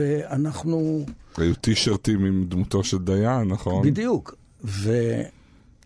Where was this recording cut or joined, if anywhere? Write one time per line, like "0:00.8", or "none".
none